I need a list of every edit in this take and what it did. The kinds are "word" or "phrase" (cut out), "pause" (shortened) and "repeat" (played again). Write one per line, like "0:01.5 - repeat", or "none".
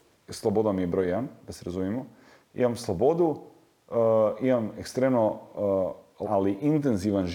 0:06.2 - word